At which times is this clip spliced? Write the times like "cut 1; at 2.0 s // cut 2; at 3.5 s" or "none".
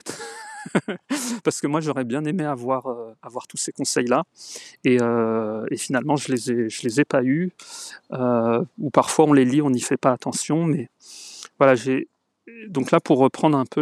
none